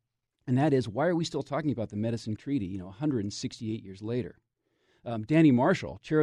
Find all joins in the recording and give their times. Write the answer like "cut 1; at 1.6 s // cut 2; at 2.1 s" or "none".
cut 1; at 2.4 s